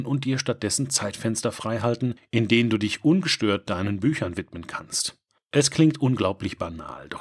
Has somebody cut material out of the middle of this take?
no; 0 cuts

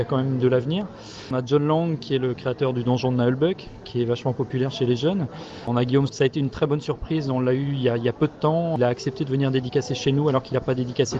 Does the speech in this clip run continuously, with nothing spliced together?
no; 1 cut; at 6.1 s

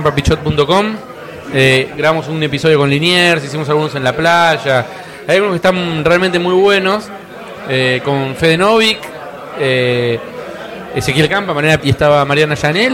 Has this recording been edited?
yes; 1 cut; at 11.8 s

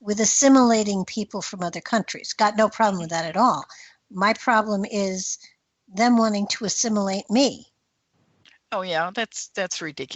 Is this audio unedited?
yes; 0 cuts

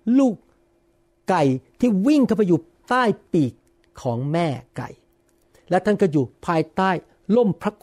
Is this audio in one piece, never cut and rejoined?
yes; 0 cuts

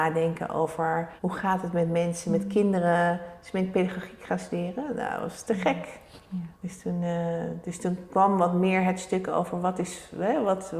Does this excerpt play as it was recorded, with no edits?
no; 2 cuts; at 1.2 s, 6.5 s

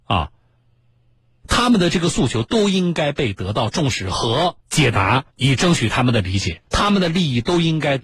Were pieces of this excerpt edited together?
yes; 3 cuts; at 4.6 s, 5.3 s, 6.7 s

